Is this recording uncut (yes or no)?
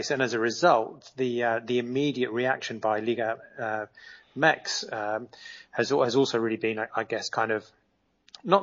yes